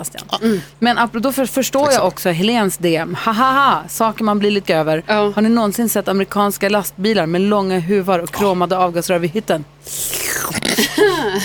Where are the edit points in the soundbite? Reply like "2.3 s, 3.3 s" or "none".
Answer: 4.6 s